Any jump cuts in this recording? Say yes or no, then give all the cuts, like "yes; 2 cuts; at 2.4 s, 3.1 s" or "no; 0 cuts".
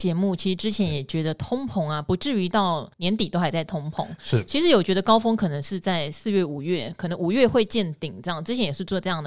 yes; 1 cut; at 2.9 s